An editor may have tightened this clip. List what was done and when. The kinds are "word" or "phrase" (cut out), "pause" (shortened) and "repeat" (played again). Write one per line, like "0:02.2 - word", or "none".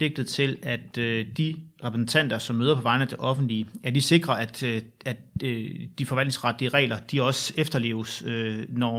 none